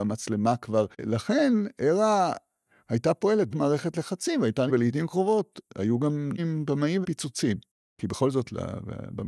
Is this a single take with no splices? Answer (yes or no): no